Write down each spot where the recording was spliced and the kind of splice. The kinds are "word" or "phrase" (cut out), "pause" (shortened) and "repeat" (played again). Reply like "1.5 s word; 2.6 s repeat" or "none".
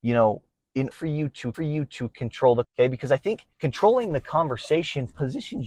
0.9 s word; 1.5 s repeat; 2.6 s word; 3.5 s pause